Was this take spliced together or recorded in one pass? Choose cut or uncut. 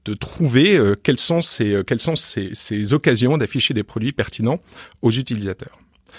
uncut